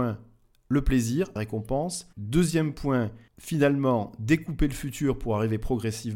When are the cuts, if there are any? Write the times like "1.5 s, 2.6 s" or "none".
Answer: 1.4 s, 2.1 s, 3.3 s